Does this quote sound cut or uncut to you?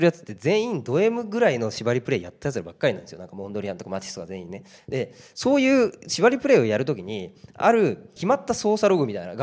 cut